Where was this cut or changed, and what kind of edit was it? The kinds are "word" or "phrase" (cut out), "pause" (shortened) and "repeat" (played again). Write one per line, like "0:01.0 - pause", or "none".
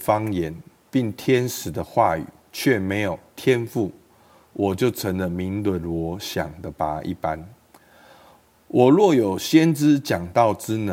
none